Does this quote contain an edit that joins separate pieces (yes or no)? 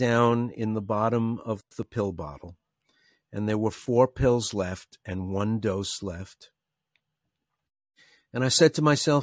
no